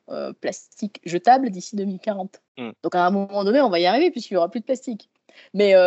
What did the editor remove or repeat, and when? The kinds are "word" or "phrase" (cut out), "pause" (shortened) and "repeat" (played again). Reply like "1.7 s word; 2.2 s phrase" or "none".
2.5 s pause

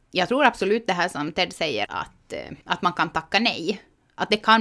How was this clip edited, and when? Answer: 1.9 s word; 2.6 s pause

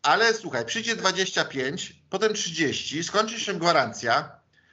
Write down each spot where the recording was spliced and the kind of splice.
none

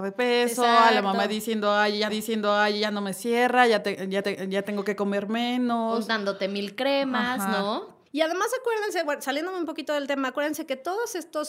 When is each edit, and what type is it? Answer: 2.1 s repeat; 4.2 s repeat; 8.1 s pause

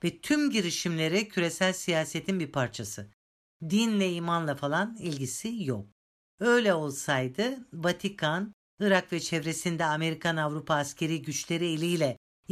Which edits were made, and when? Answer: none

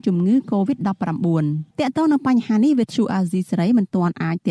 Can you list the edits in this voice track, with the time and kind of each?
1.7 s pause

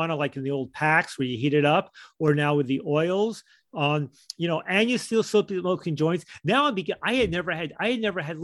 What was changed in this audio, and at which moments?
none

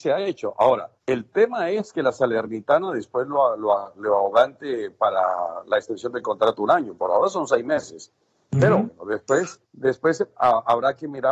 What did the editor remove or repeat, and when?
1.0 s pause; 9.6 s pause

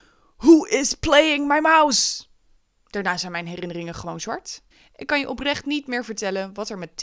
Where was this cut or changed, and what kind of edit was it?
2.6 s pause; 4.7 s pause

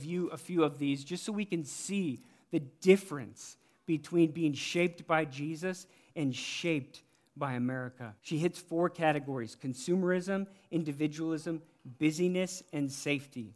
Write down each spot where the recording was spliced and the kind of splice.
8.2 s pause

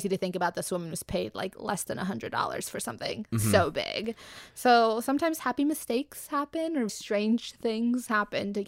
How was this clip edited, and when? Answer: 6.9 s word

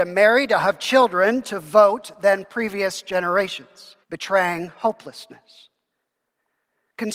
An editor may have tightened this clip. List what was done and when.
4.0 s pause

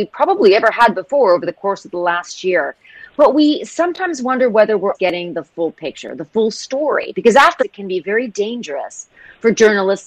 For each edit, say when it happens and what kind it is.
4.9 s word; 7.6 s phrase

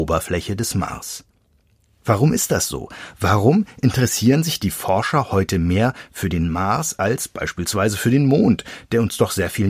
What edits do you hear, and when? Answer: none

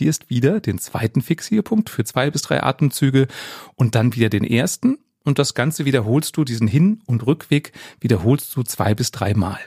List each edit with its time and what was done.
none

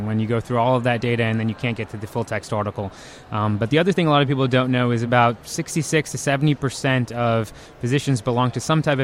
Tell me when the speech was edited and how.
none

